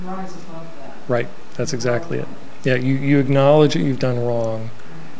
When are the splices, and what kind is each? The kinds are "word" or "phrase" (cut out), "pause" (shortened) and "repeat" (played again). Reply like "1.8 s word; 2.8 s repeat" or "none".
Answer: none